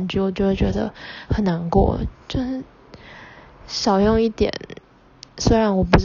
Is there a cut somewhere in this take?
yes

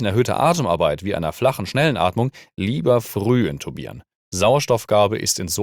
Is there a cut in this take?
no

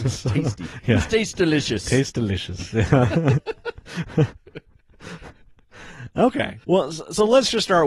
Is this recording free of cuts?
no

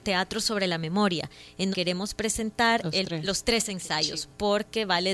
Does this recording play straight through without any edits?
no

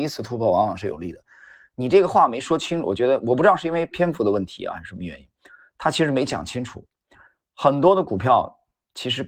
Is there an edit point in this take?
no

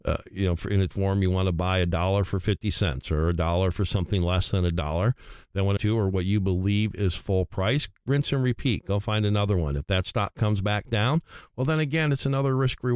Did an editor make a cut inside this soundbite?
yes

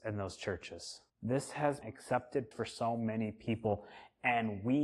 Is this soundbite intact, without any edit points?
no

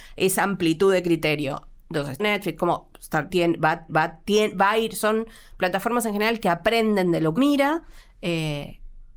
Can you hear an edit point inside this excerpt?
yes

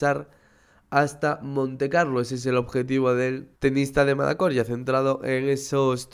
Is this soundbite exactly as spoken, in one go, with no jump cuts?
no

